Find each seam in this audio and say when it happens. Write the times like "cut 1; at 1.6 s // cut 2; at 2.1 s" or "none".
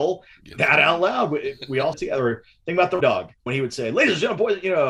cut 1; at 1.9 s // cut 2; at 3.0 s // cut 3; at 3.5 s